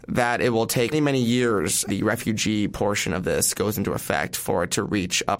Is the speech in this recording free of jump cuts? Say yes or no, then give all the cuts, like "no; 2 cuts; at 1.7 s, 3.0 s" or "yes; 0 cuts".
no; 2 cuts; at 0.9 s, 1.9 s